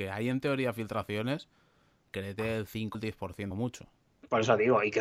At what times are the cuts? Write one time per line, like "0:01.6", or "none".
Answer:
0:02.1
0:02.9
0:03.5